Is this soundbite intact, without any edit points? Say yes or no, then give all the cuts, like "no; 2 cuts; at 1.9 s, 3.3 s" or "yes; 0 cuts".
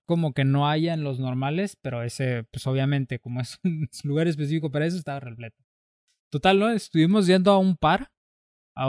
yes; 0 cuts